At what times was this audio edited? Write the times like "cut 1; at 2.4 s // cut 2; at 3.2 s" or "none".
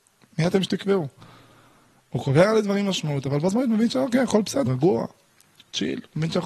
cut 1; at 4.7 s